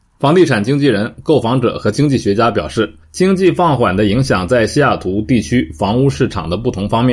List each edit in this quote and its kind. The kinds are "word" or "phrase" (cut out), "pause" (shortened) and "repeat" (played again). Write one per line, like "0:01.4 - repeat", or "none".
0:03.0 - pause